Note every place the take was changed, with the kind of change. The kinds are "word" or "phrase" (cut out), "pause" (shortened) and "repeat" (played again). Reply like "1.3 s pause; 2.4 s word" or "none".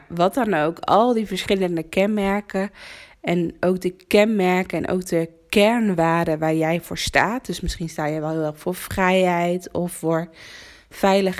none